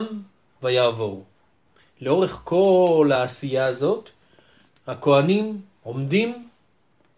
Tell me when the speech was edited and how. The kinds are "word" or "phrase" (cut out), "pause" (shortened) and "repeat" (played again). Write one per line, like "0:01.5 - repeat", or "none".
none